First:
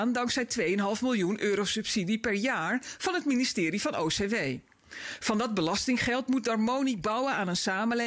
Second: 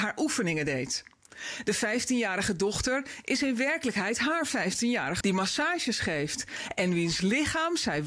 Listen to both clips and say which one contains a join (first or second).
second